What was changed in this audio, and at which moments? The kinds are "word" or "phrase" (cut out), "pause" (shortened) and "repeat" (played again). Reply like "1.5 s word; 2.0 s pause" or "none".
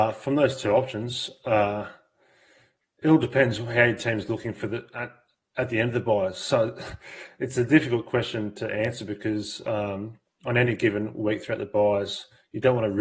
none